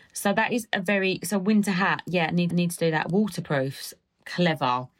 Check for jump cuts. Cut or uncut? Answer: cut